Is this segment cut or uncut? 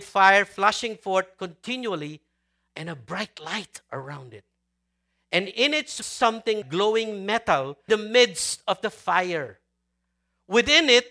cut